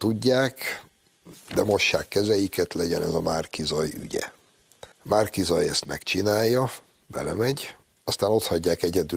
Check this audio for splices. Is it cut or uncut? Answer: cut